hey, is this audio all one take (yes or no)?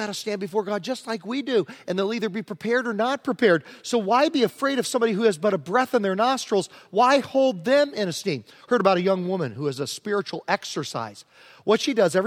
yes